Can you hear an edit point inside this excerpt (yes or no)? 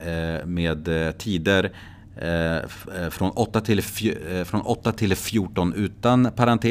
no